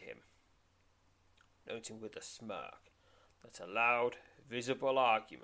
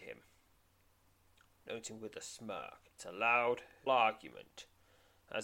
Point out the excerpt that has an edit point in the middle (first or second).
second